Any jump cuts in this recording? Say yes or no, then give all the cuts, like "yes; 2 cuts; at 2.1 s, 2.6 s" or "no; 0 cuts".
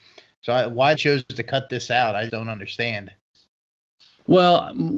yes; 2 cuts; at 0.9 s, 2.3 s